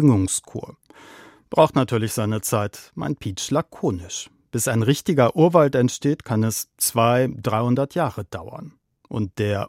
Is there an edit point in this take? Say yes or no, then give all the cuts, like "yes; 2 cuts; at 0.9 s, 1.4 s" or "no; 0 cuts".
no; 0 cuts